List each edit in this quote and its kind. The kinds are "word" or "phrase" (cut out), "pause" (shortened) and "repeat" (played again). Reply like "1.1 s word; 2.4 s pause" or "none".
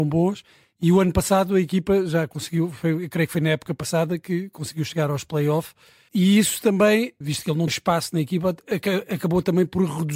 6.1 s word; 7.2 s word; 7.7 s word